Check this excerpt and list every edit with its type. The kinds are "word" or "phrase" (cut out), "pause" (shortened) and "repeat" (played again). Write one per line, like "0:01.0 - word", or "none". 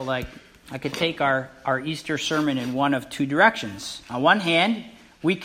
none